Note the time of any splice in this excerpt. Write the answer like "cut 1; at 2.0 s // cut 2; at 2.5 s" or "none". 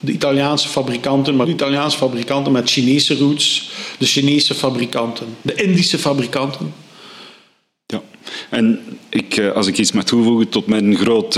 cut 1; at 1.4 s // cut 2; at 5.4 s